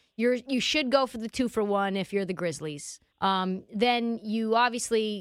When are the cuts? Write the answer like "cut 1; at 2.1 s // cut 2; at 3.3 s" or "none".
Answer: cut 1; at 3.1 s